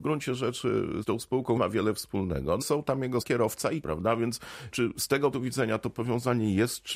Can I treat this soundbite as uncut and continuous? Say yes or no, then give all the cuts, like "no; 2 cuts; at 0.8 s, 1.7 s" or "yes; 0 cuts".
no; 7 cuts; at 1.0 s, 1.6 s, 2.6 s, 3.2 s, 3.8 s, 4.7 s, 5.3 s